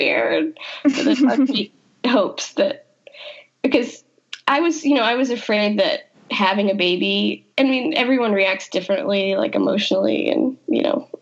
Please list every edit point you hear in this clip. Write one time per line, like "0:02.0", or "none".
0:06.1
0:07.5